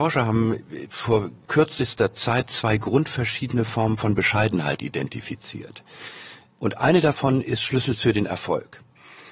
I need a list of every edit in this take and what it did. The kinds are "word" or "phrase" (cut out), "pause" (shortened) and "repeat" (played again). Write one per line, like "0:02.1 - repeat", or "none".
0:01.5 - word